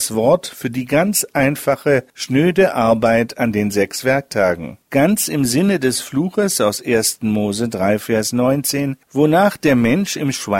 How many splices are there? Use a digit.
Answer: 3